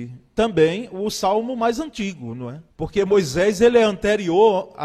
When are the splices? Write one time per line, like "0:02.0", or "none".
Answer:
0:02.7